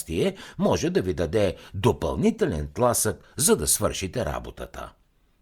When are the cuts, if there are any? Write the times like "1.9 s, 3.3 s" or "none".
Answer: none